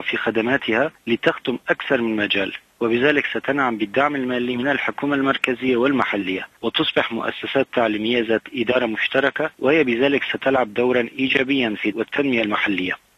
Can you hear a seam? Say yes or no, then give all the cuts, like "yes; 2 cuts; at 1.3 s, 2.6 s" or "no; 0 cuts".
yes; 2 cuts; at 9.5 s, 11.9 s